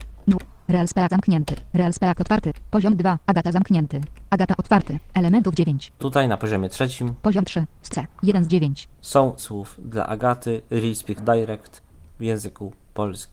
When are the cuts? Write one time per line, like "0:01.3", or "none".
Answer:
0:01.1
0:02.1
0:06.0
0:07.9
0:09.4
0:11.2